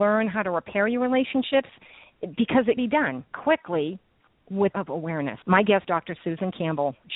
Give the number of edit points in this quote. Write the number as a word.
five